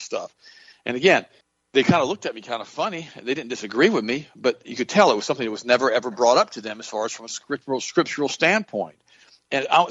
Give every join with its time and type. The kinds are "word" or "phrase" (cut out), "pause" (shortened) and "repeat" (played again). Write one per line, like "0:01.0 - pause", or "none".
0:01.4 - pause